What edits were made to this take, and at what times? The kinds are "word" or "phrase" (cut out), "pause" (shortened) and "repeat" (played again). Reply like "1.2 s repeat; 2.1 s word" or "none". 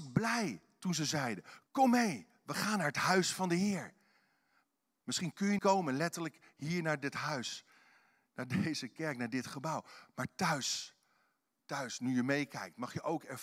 1.7 s word; 5.6 s word